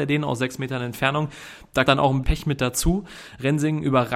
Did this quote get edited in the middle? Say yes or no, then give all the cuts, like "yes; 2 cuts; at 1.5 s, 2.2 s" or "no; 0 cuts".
yes; 2 cuts; at 1.9 s, 2.2 s